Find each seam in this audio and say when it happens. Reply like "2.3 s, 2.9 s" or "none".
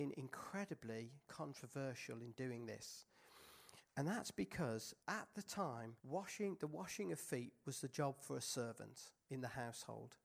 5.0 s, 6.0 s